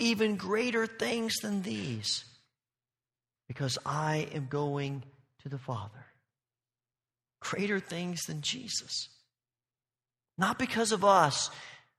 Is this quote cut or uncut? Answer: uncut